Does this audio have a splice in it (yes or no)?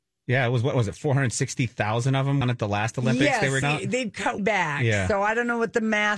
yes